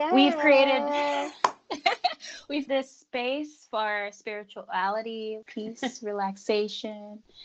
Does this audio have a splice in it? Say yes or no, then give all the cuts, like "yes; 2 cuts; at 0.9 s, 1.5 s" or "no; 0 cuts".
yes; 2 cuts; at 2.7 s, 5.4 s